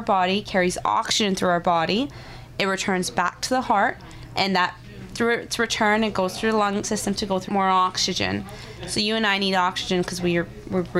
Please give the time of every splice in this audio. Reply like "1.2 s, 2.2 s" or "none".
6.8 s, 7.5 s